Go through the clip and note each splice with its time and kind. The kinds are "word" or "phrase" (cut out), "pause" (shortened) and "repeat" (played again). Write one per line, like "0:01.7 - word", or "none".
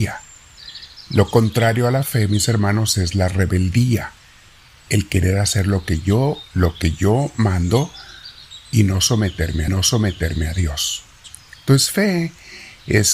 0:06.5 - word
0:09.7 - repeat